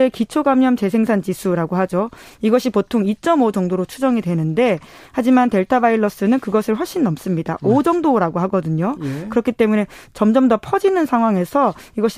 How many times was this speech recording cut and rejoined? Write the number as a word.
zero